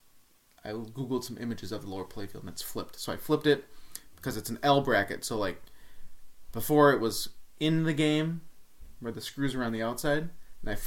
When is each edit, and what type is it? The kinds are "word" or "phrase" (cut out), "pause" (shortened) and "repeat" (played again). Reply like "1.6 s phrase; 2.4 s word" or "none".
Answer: none